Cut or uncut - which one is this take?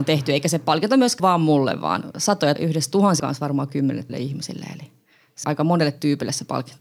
cut